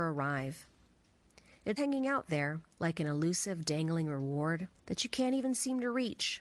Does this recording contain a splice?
yes; 3 cuts; at 1.8 s, 2.7 s, 4.7 s

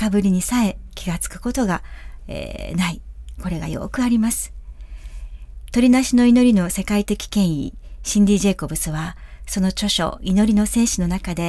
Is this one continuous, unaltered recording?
yes; 0 cuts

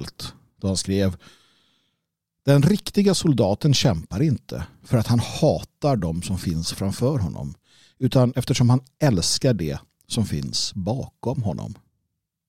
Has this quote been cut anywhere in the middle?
no; 0 cuts

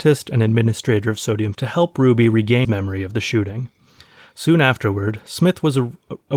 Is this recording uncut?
no; 2 cuts; at 1.5 s, 2.6 s

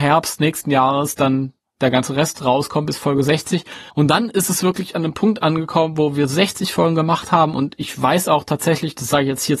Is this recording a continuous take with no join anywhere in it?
no; 1 cut; at 3.9 s

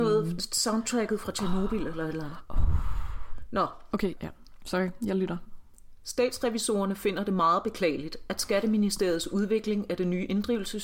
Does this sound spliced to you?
yes; 1 cut; at 4.2 s

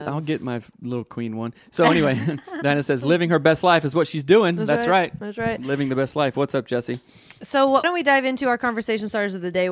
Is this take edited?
yes; 1 cut; at 7.8 s

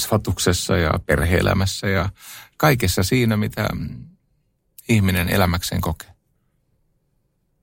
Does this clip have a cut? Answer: no; 0 cuts

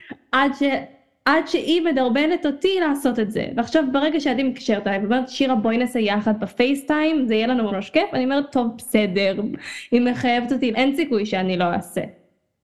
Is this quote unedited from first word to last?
no; 2 cuts; at 7.7 s, 10.7 s

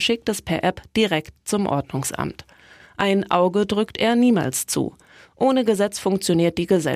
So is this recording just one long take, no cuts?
yes; 0 cuts

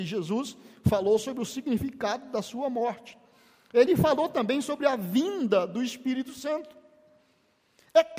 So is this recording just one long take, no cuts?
yes; 0 cuts

